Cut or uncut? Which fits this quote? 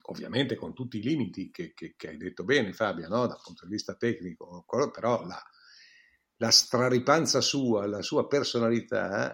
uncut